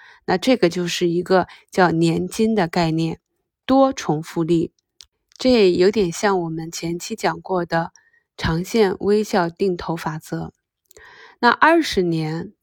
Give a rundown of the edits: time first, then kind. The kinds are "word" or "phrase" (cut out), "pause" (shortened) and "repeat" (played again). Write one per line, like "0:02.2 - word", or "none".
none